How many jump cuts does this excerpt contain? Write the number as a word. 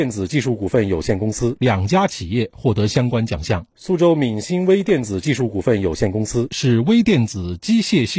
one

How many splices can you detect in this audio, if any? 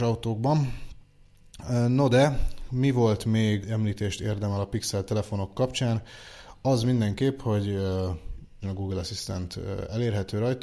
two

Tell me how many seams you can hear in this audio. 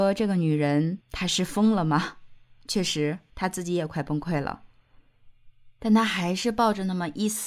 two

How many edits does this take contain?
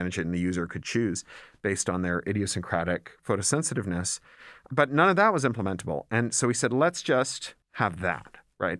one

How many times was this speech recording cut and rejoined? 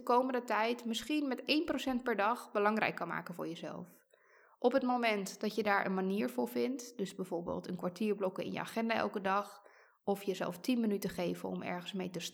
zero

